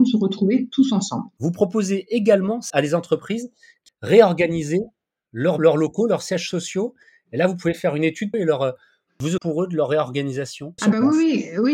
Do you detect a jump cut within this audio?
yes; 6 cuts; at 2.7 s, 3.9 s, 5.6 s, 8.3 s, 9.4 s, 10.8 s

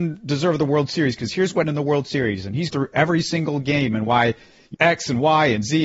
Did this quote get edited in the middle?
yes; 3 cuts; at 1.6 s, 2.7 s, 4.7 s

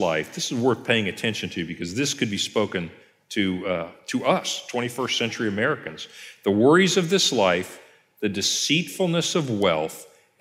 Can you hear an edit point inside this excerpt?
no; 0 cuts

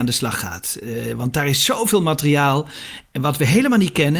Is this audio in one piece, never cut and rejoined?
yes; 0 cuts

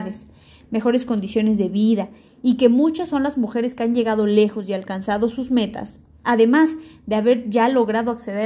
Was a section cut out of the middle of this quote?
no; 0 cuts

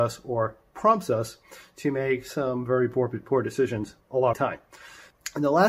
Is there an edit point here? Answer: yes; 2 cuts; at 4.0 s, 4.3 s

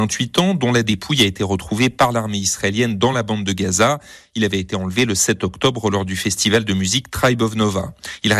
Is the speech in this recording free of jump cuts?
yes; 0 cuts

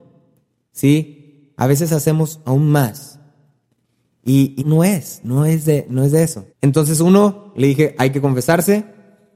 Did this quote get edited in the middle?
yes; 2 cuts; at 4.6 s, 6.5 s

